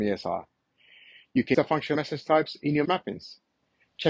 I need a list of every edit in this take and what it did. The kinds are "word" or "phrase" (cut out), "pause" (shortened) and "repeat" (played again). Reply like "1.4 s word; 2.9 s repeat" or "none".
1.5 s word; 1.9 s phrase; 2.8 s word